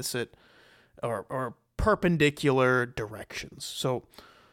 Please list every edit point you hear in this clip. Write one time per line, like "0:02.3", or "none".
none